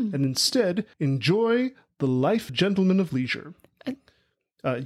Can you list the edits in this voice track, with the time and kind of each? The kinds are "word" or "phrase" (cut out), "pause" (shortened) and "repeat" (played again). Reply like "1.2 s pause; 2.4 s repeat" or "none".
0.9 s pause; 2.5 s phrase